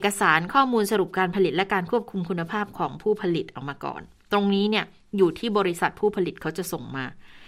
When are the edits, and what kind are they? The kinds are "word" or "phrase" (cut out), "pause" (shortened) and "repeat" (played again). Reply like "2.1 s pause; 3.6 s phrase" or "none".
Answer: none